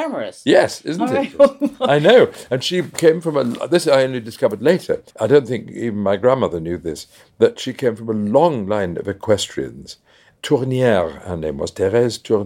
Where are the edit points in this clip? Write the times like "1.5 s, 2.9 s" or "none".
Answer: 5.1 s